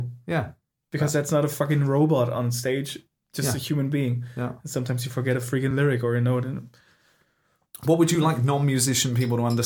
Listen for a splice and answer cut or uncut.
uncut